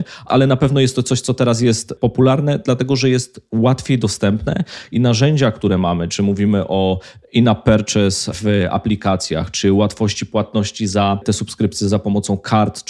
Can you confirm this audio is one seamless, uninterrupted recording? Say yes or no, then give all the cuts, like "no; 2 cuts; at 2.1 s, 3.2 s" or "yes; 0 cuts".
yes; 0 cuts